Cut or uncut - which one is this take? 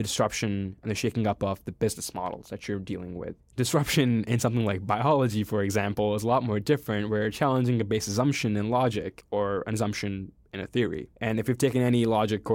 uncut